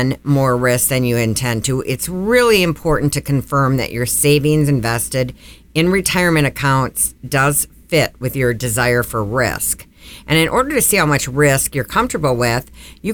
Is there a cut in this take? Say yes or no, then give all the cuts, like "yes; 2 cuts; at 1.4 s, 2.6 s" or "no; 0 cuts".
no; 0 cuts